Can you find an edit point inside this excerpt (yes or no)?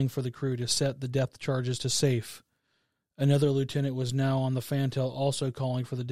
no